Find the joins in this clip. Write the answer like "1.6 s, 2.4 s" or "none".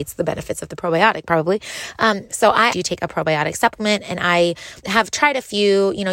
2.7 s, 4.8 s